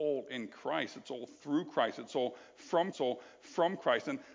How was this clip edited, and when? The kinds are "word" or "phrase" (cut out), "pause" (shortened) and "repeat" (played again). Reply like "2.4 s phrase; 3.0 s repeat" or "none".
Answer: 2.9 s repeat